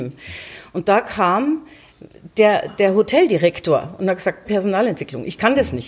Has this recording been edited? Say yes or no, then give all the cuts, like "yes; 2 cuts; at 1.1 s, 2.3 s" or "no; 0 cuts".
yes; 1 cut; at 4.4 s